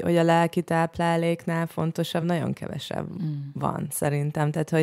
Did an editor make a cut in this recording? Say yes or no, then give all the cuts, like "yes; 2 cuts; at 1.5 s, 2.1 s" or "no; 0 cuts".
no; 0 cuts